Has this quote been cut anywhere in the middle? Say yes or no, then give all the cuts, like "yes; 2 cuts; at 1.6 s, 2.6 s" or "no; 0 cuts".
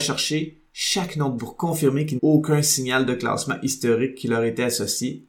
yes; 2 cuts; at 1.4 s, 2.2 s